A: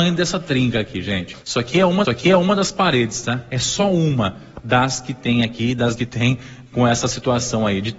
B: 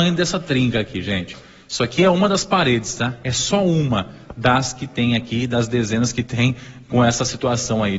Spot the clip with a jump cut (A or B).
A